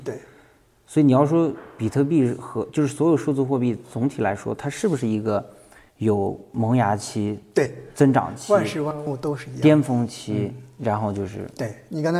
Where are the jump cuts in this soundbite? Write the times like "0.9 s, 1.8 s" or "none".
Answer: 10.8 s